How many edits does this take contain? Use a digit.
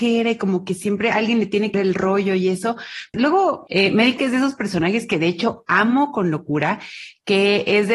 2